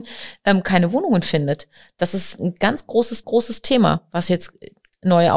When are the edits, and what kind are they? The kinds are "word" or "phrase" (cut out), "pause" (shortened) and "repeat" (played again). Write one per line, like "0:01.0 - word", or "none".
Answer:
0:03.2 - repeat

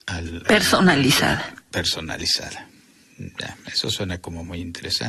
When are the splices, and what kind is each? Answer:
none

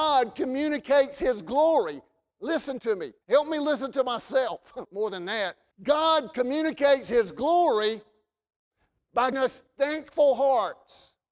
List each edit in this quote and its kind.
0:03.2 - pause
0:04.9 - word
0:05.7 - pause
0:09.3 - word

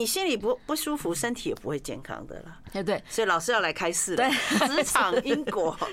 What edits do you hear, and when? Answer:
0:04.6 - word

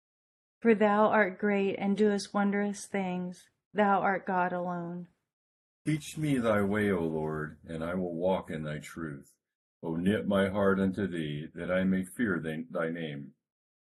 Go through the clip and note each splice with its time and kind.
none

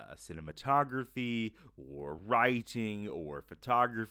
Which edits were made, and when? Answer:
none

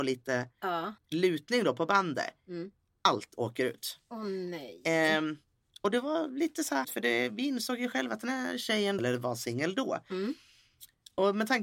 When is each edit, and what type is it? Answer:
0:01.0 - pause
0:06.8 - word
0:09.0 - phrase

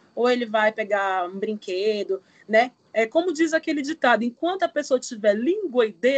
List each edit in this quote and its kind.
none

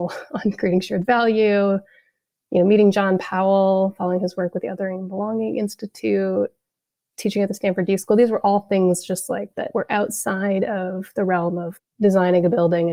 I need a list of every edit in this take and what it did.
none

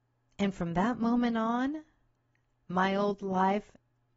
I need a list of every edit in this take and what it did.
none

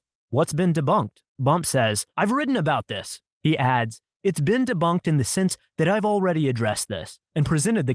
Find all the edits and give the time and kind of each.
0:01.3 - pause
0:02.1 - pause

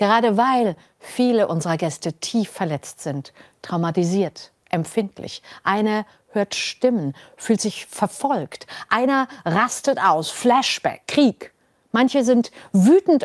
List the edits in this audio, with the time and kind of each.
none

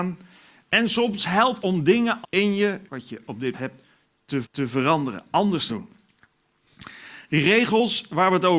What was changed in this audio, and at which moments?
0:01.6 - word
0:02.2 - word
0:02.9 - word
0:03.5 - word
0:04.4 - repeat
0:05.7 - phrase

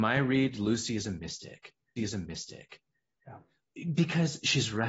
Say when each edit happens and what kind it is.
0:02.0 - repeat

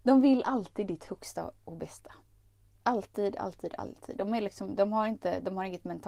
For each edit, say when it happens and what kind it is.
none

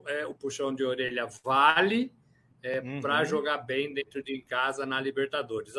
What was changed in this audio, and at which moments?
none

